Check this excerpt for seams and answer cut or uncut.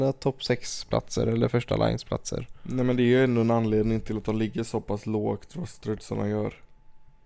uncut